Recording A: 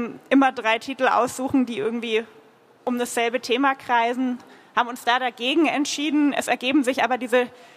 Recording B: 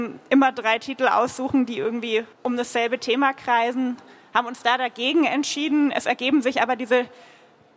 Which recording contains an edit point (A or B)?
B